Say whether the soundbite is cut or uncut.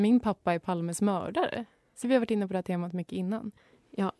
cut